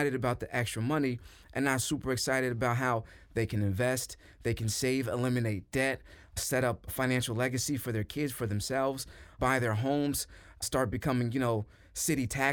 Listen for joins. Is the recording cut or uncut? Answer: uncut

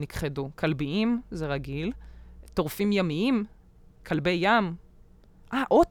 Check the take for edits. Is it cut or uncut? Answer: uncut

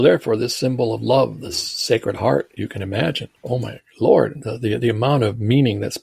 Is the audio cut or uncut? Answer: cut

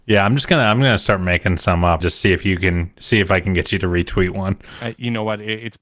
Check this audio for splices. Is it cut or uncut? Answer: cut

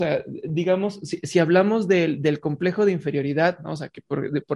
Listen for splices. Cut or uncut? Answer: uncut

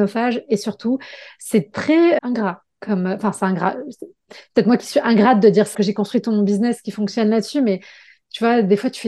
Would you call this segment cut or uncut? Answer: cut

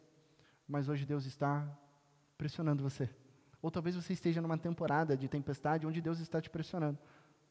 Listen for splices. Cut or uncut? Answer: uncut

